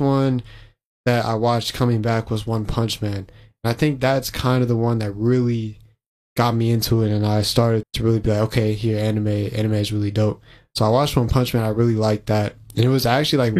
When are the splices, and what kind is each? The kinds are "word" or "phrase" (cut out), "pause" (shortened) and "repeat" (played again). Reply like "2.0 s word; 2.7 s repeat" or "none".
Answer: 7.8 s word